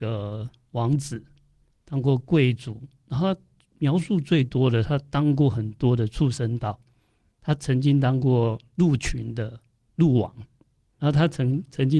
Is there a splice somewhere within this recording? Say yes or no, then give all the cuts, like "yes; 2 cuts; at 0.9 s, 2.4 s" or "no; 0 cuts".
yes; 1 cut; at 11.0 s